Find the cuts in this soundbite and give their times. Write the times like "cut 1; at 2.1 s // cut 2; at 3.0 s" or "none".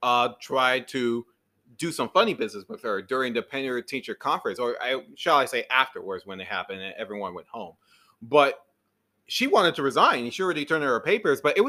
none